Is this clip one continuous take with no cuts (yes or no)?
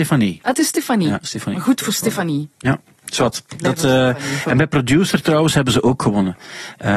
yes